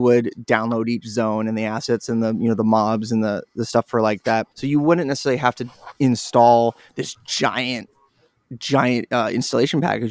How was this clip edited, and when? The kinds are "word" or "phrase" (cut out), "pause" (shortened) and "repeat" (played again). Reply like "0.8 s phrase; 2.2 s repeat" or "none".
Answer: 4.5 s pause